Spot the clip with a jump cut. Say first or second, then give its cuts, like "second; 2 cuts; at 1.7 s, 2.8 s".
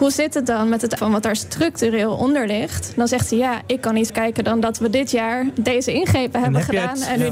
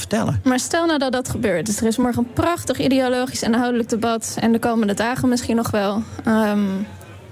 first; 2 cuts; at 1.0 s, 4.1 s